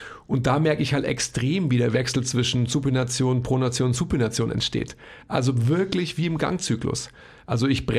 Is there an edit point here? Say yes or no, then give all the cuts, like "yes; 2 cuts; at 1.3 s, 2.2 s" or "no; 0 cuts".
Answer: no; 0 cuts